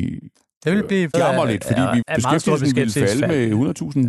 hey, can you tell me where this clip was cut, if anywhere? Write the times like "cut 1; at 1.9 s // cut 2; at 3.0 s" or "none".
cut 1; at 1.1 s // cut 2; at 2.0 s